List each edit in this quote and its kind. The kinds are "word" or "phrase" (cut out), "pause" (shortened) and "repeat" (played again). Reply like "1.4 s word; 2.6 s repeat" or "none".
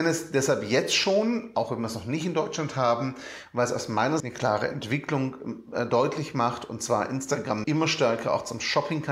4.2 s word; 7.6 s word